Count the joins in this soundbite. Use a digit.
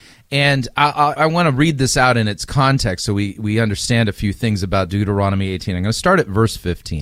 1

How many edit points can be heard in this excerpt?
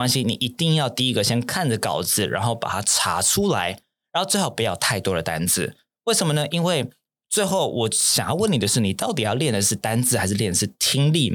0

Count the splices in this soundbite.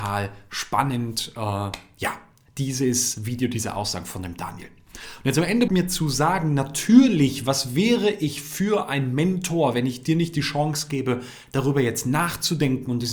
1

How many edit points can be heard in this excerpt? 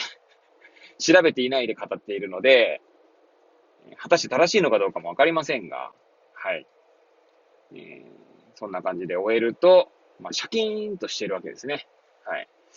0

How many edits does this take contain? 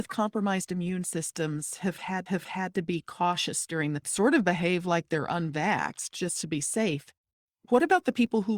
2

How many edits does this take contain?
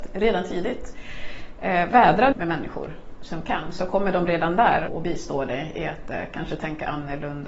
2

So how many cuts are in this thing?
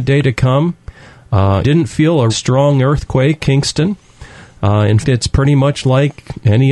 4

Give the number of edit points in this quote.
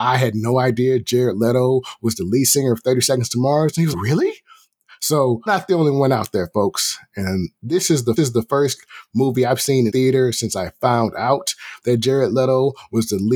5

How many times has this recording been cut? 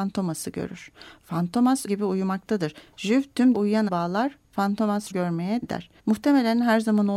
6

